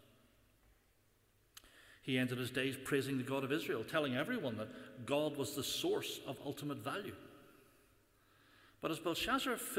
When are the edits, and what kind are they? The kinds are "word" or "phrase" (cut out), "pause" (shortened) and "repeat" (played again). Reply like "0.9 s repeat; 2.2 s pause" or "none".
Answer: none